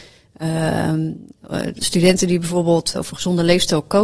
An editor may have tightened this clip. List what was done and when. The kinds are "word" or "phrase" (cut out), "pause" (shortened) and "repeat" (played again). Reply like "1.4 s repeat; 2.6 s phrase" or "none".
1.8 s word; 2.9 s word

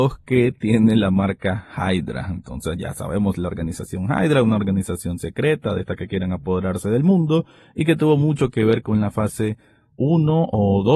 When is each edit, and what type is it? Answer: none

